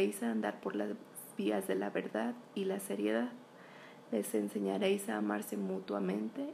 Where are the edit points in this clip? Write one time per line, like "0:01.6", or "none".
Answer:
none